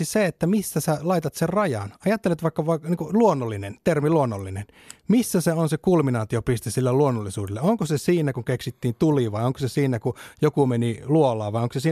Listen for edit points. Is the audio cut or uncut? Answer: uncut